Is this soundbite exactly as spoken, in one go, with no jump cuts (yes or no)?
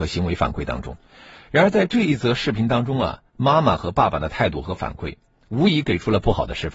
no